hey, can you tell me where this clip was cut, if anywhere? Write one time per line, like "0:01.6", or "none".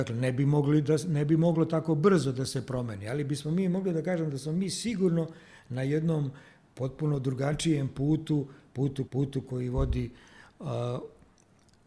0:09.1